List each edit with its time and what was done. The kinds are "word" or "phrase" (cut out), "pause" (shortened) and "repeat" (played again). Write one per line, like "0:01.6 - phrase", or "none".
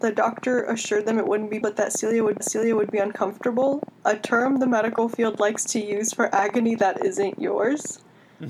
0:01.6 - word
0:02.4 - repeat